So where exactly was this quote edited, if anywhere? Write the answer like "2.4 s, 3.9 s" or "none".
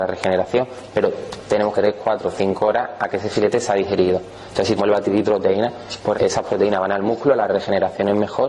1.7 s, 4.8 s, 5.3 s, 6.1 s